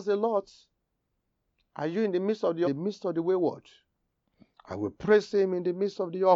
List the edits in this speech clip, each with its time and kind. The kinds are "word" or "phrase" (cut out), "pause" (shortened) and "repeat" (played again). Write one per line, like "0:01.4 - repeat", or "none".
0:02.6 - phrase